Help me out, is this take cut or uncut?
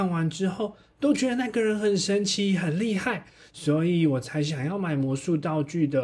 uncut